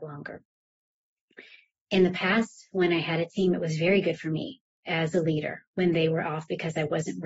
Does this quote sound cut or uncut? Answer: uncut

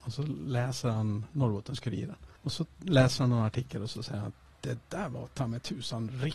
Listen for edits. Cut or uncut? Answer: cut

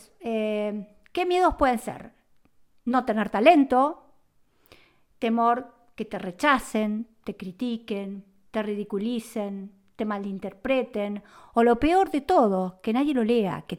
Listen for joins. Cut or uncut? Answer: uncut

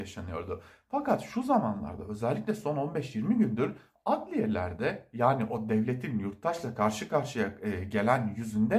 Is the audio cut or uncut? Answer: uncut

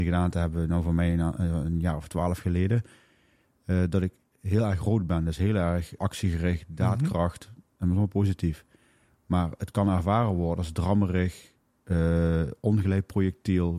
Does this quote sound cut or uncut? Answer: cut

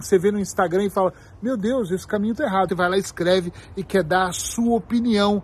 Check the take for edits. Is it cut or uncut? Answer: cut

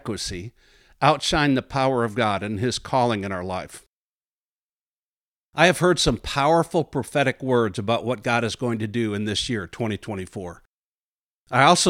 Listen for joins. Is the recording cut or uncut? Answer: uncut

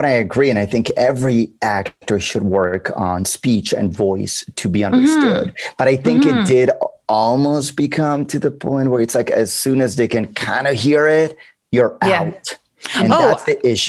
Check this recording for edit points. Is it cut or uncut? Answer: uncut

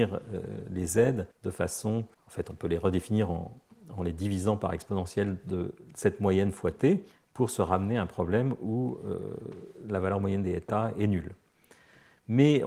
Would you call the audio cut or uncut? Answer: cut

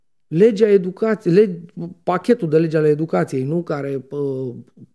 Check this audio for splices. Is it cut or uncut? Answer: uncut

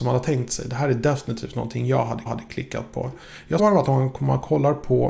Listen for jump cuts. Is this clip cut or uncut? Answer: cut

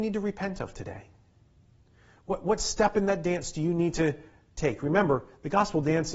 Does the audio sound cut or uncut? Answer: uncut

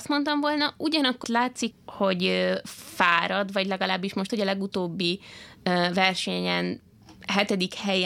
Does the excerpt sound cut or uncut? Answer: cut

